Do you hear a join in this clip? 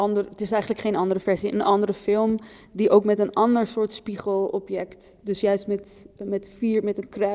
no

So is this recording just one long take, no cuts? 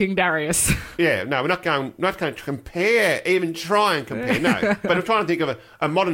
yes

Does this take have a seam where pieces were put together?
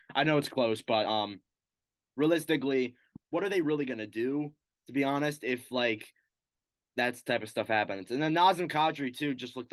no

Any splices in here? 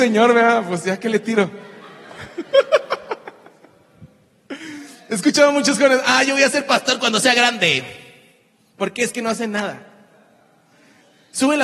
no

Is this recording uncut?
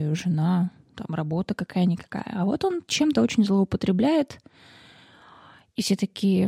yes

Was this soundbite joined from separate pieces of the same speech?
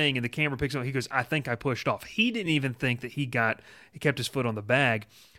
no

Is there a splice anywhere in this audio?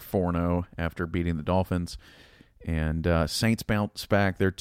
no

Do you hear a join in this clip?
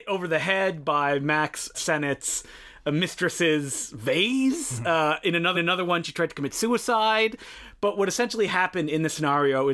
yes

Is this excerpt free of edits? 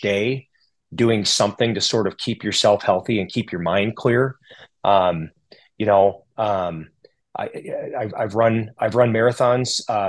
yes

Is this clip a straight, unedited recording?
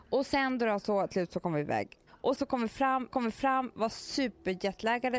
no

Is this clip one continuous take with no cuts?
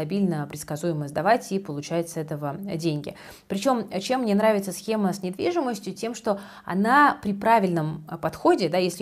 yes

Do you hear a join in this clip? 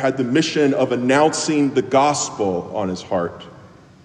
no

